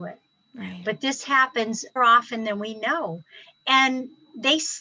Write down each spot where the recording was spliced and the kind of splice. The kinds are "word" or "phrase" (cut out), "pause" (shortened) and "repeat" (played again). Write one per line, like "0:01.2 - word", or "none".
0:02.0 - word